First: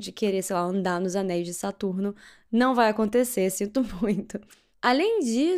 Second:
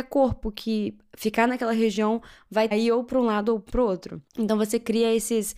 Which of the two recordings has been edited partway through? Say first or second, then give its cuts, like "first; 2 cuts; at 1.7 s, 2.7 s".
second; 2 cuts; at 2.7 s, 4.3 s